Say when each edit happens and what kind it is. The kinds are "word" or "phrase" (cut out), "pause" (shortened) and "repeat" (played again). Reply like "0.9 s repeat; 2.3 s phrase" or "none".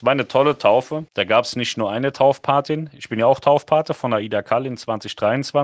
1.1 s pause